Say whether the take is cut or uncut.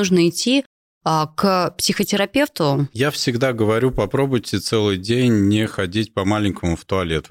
uncut